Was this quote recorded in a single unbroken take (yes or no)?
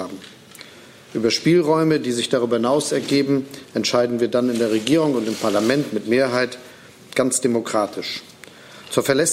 yes